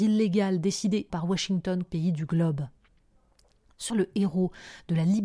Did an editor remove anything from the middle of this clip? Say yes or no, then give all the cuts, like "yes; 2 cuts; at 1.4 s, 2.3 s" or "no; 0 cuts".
yes; 3 cuts; at 1.1 s, 1.8 s, 3.9 s